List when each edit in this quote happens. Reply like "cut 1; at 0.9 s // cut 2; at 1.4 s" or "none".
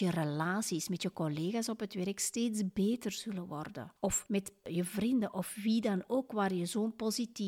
none